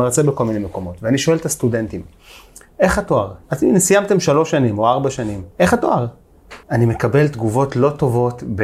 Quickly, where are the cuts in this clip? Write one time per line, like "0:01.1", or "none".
0:02.7
0:03.4
0:05.5
0:06.6